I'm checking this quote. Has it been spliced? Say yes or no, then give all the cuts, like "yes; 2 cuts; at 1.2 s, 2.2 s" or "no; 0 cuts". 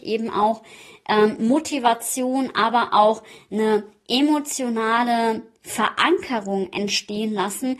no; 0 cuts